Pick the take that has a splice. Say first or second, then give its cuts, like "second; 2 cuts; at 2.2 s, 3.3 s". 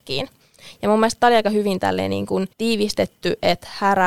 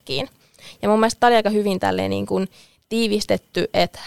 first; 1 cut; at 2.5 s